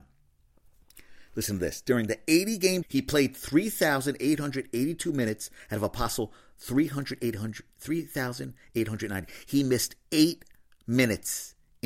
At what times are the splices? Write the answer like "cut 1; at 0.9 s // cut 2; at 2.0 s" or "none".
cut 1; at 2.8 s